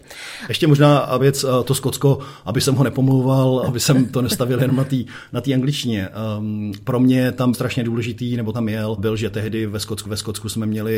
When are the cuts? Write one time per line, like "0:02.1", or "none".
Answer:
0:01.2
0:03.7
0:07.5
0:08.5
0:09.0
0:10.1